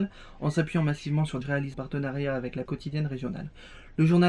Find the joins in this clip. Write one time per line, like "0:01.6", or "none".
0:01.4
0:01.7
0:02.7